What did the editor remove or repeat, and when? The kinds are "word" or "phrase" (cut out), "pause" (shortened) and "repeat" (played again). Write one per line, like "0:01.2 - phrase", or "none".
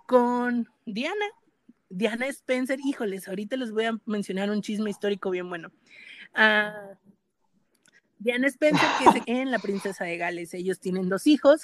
0:09.2 - word